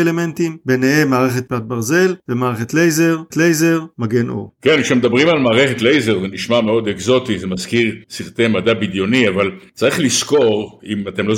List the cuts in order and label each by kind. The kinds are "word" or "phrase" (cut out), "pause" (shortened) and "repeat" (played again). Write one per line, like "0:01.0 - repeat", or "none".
0:01.5 - word
0:03.3 - repeat
0:08.0 - pause